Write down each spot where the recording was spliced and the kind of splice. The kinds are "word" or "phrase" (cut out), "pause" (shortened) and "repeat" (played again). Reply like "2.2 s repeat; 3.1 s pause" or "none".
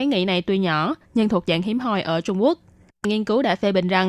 3.0 s word